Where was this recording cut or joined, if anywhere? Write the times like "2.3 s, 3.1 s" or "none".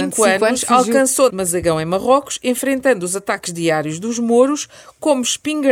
1.3 s